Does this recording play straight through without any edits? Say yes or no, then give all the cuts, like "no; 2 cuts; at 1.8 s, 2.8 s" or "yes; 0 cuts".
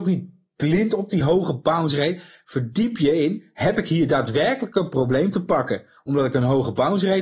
yes; 0 cuts